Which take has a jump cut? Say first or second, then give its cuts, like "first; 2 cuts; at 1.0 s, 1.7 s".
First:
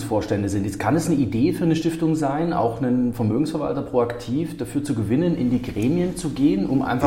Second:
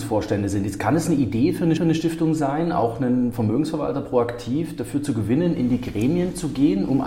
second; 1 cut; at 1.8 s